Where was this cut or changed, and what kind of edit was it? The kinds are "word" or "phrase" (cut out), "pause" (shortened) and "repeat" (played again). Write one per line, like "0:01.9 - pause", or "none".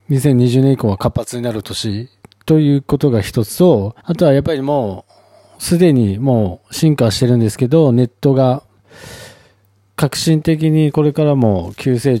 0:04.0 - pause

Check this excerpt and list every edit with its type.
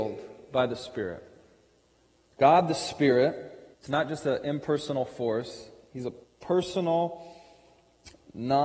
0:02.0 - pause
0:03.7 - pause
0:06.2 - pause

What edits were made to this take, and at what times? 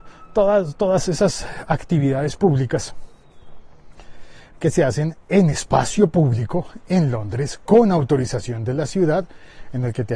0:05.5 - word

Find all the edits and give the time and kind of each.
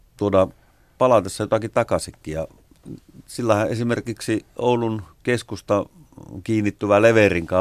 none

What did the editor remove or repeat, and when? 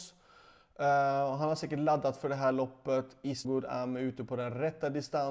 0:03.4 - word

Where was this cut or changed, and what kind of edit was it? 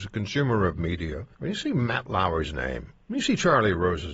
0:01.3 - pause

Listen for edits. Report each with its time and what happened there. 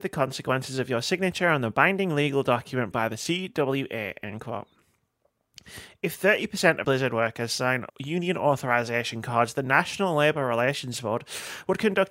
0:02.9 - phrase
0:06.8 - word
0:07.9 - pause

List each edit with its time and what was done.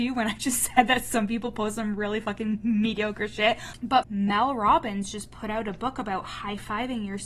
0:04.0 - phrase

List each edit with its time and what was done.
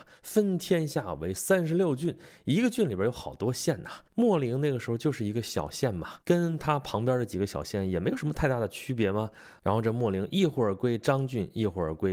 0:04.1 - pause
0:06.2 - pause

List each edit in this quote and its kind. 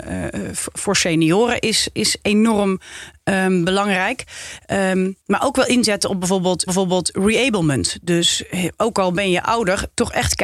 0:05.2 - pause
0:06.7 - repeat

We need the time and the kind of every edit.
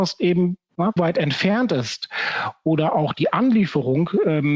0:01.0 - phrase

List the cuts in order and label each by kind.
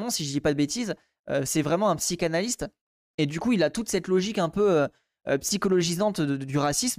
none

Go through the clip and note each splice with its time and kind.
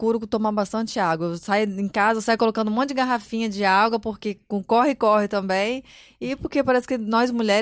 none

